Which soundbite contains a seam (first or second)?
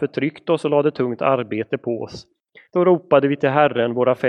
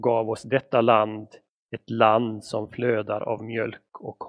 first